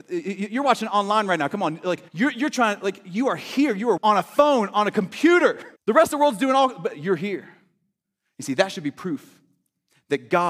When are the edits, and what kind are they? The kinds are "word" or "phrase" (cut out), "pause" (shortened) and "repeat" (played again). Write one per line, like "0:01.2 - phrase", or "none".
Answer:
0:02.1 - pause
0:04.0 - phrase
0:05.8 - pause